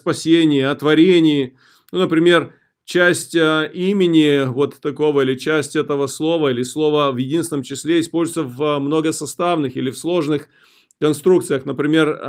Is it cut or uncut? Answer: uncut